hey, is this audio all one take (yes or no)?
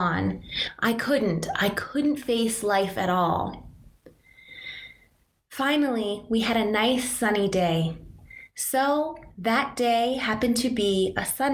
yes